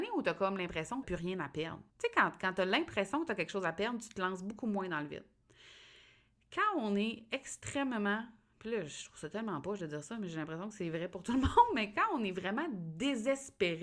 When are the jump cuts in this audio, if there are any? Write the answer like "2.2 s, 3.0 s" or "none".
1.0 s, 1.9 s